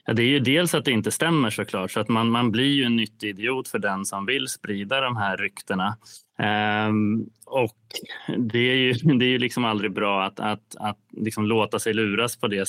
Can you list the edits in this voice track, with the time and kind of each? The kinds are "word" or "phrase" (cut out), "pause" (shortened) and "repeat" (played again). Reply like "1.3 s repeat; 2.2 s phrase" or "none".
6.3 s pause